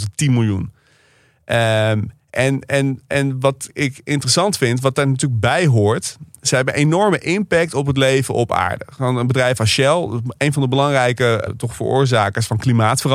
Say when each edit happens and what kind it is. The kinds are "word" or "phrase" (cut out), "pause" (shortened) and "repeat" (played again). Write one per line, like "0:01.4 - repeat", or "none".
0:11.5 - word